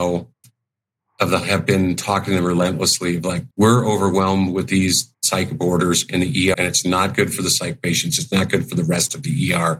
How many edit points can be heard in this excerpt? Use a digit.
3